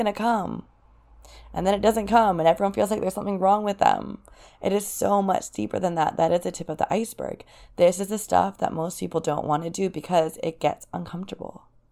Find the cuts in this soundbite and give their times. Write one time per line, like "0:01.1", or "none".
none